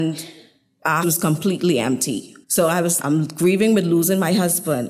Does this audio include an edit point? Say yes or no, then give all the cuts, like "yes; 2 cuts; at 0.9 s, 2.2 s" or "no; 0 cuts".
yes; 3 cuts; at 1.0 s, 2.4 s, 3.0 s